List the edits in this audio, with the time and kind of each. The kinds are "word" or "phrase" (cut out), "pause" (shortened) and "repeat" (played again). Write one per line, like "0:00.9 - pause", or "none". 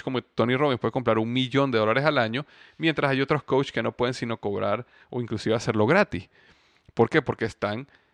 none